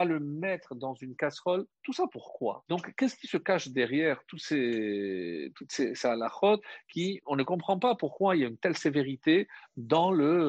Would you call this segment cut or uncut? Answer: cut